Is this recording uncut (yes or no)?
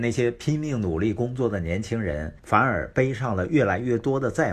no